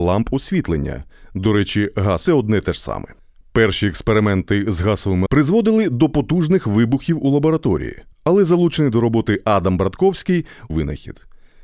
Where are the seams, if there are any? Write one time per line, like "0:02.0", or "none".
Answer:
0:02.3
0:03.4
0:05.3
0:08.1
0:10.7

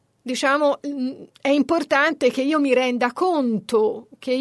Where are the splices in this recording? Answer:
none

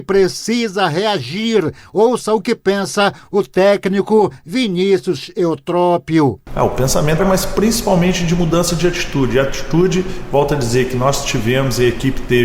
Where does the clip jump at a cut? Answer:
0:07.2

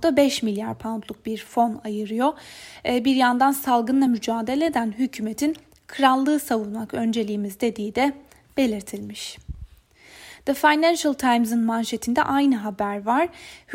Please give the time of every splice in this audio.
none

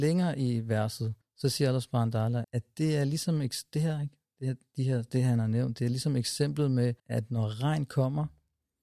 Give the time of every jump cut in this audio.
0:01.2
0:02.4
0:07.0

